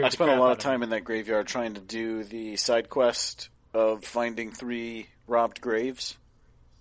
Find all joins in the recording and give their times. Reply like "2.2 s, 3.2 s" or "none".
none